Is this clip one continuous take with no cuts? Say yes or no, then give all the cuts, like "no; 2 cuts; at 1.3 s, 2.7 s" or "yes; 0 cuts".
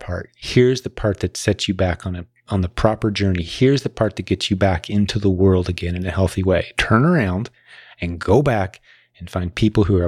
yes; 0 cuts